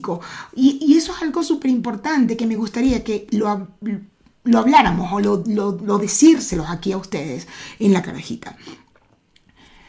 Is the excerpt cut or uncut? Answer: uncut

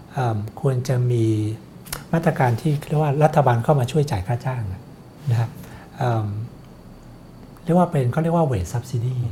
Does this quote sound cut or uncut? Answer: cut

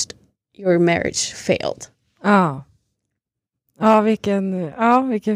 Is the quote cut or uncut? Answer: uncut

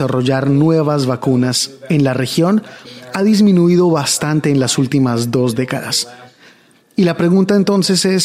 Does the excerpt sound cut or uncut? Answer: uncut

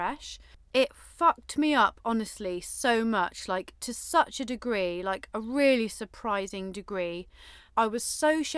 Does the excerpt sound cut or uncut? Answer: cut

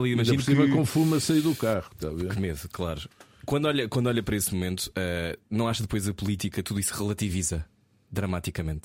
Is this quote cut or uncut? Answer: uncut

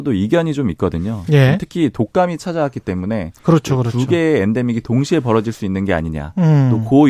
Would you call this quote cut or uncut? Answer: uncut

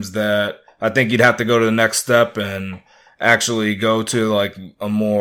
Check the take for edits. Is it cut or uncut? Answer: uncut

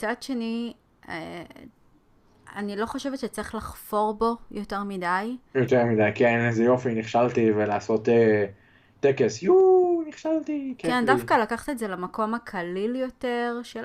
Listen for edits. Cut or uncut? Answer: uncut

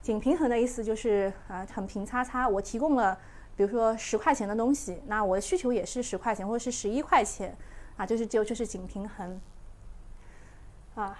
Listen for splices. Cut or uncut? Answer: cut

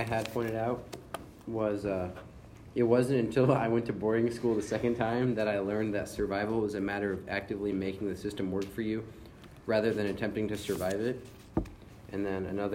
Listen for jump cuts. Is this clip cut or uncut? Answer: uncut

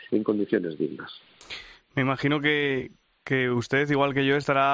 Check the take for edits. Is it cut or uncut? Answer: uncut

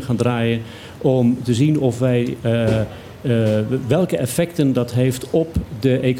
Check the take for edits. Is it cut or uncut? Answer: uncut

